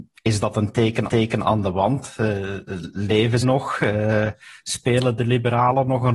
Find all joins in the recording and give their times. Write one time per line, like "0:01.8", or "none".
0:01.1
0:03.4